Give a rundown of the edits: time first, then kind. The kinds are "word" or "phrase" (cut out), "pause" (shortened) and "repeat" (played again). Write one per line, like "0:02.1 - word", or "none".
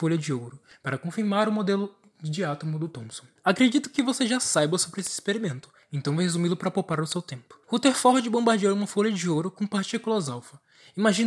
0:03.4 - pause
0:07.6 - pause